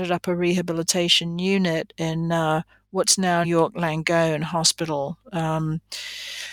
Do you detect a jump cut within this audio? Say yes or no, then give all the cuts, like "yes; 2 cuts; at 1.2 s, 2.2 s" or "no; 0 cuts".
yes; 2 cuts; at 2.7 s, 3.4 s